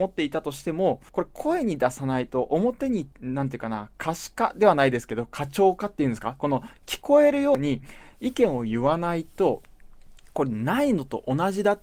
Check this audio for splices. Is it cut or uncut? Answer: cut